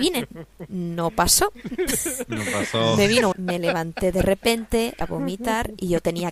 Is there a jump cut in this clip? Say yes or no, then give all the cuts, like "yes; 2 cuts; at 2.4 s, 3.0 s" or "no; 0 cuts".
yes; 2 cuts; at 3.3 s, 5.0 s